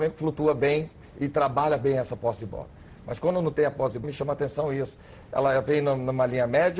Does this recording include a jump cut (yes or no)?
yes